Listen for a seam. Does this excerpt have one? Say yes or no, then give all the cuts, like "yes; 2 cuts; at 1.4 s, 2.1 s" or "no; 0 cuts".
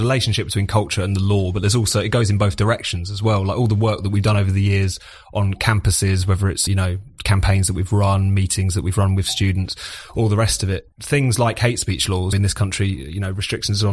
yes; 3 cuts; at 6.7 s, 10.9 s, 12.3 s